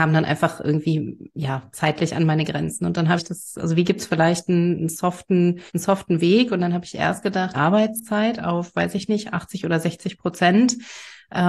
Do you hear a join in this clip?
yes; 3 cuts; at 3.2 s, 5.7 s, 7.5 s

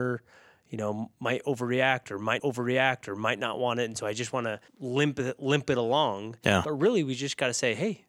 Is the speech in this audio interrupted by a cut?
yes; 2 cuts; at 2.4 s, 4.7 s

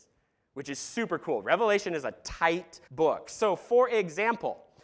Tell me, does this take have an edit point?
yes; 1 cut; at 2.9 s

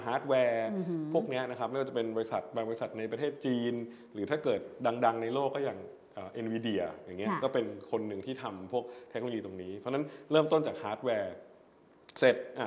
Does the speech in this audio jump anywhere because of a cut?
no; 0 cuts

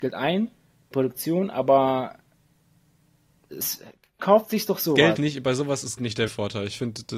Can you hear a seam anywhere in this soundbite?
yes; 5 cuts; at 0.9 s, 4.2 s, 5.2 s, 6.0 s, 6.3 s

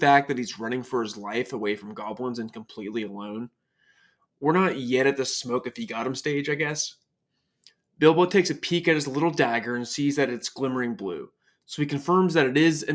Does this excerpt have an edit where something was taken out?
no; 0 cuts

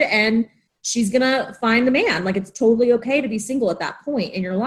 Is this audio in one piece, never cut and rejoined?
yes; 0 cuts

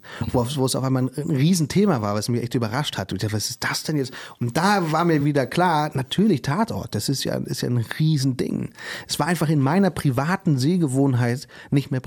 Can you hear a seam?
no; 0 cuts

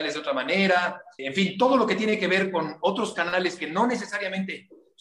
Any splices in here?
yes; 1 cut; at 1.2 s

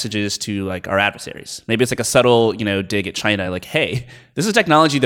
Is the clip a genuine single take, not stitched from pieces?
yes; 0 cuts

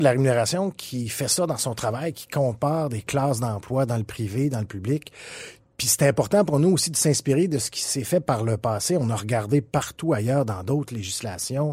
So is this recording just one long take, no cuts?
yes; 0 cuts

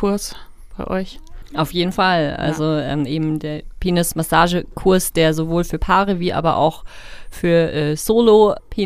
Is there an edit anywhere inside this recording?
no; 0 cuts

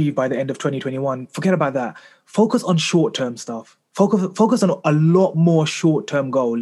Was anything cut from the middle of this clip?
no; 0 cuts

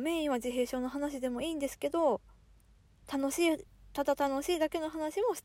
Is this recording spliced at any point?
no; 0 cuts

